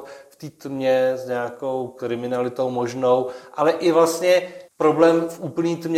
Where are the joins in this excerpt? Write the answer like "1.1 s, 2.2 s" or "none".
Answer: 4.7 s